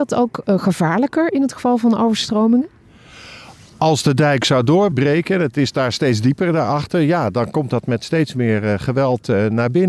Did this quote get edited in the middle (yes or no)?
no